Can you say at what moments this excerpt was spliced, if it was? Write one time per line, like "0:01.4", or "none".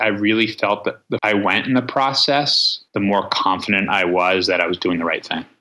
0:01.2
0:02.9